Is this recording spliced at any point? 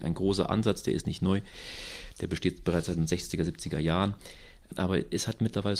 no; 0 cuts

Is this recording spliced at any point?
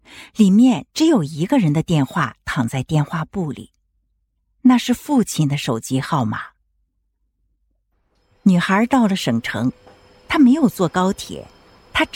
no; 0 cuts

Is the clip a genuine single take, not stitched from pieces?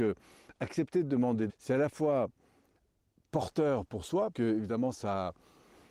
no; 2 cuts; at 1.5 s, 4.3 s

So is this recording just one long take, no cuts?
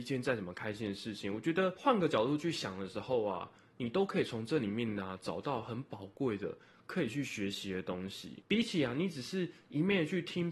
yes; 0 cuts

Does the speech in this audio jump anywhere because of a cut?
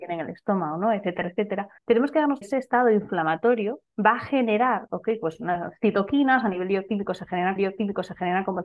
yes; 4 cuts; at 1.8 s, 2.4 s, 3.9 s, 7.6 s

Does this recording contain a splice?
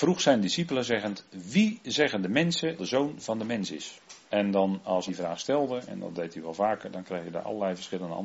yes; 3 cuts; at 2.8 s, 4.2 s, 5.1 s

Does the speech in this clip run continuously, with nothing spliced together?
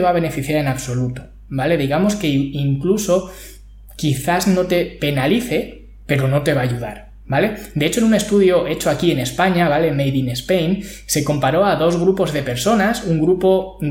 yes; 0 cuts

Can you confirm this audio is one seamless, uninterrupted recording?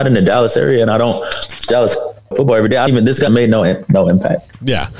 no; 4 cuts; at 1.7 s, 2.3 s, 2.9 s, 3.3 s

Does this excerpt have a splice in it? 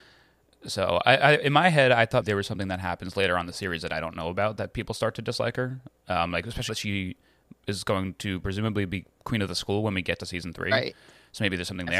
yes; 3 cuts; at 1.2 s, 2.2 s, 6.7 s

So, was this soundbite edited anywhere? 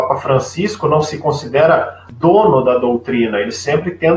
no; 0 cuts

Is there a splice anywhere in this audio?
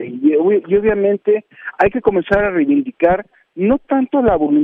no; 0 cuts

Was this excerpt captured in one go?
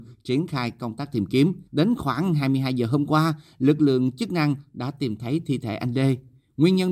no; 1 cut; at 1.7 s

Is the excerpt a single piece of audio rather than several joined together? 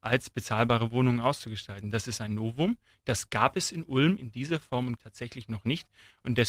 no; 1 cut; at 5.0 s

